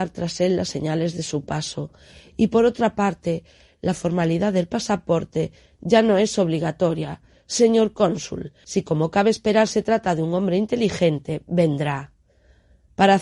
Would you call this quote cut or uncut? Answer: uncut